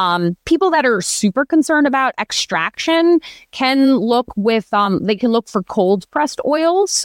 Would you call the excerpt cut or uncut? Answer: uncut